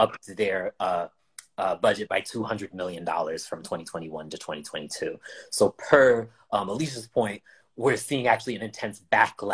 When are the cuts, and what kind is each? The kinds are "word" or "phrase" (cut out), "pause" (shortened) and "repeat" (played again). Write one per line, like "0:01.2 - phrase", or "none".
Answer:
none